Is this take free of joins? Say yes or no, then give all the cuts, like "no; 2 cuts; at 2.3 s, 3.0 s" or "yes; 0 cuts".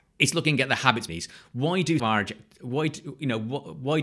no; 2 cuts; at 1.1 s, 2.0 s